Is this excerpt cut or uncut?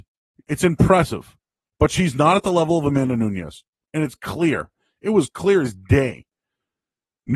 uncut